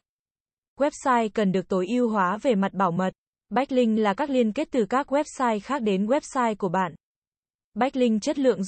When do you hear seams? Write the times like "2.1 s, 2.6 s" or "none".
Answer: none